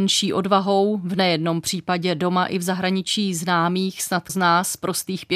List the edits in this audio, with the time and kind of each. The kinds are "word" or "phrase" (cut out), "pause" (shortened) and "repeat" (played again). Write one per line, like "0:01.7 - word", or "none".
0:04.3 - word